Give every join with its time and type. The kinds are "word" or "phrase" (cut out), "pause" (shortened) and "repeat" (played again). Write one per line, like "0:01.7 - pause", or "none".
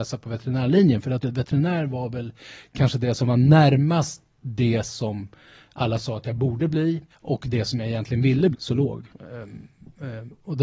0:01.2 - word
0:07.1 - pause
0:08.5 - word
0:09.1 - pause